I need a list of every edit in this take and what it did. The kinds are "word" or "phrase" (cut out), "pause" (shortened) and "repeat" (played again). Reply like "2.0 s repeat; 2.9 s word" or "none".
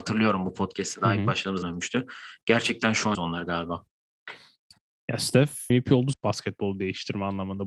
1.6 s word; 3.1 s word; 5.7 s word; 6.1 s word